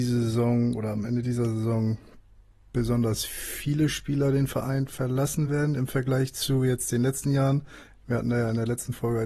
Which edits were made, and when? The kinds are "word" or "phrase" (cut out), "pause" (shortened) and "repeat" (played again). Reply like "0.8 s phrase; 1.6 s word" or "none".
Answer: none